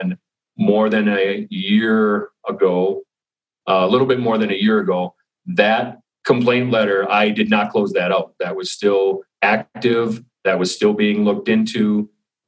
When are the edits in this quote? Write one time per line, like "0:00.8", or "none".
none